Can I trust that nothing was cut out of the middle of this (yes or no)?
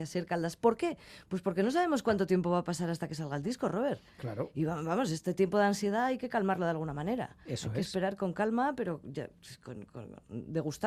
yes